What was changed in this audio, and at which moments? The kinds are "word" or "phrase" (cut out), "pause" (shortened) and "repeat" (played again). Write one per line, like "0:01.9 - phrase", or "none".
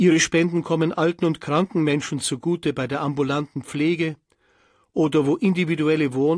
none